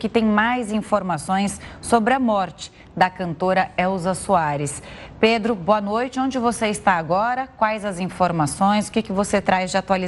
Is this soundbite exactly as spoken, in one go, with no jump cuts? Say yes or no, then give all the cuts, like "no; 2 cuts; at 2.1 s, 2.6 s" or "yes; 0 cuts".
yes; 0 cuts